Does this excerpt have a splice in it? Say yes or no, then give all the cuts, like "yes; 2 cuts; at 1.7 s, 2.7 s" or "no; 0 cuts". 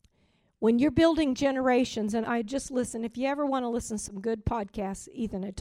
yes; 1 cut; at 2.2 s